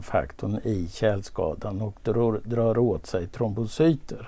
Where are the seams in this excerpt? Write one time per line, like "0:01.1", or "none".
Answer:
none